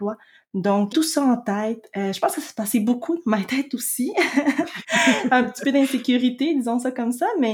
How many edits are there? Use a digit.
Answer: 1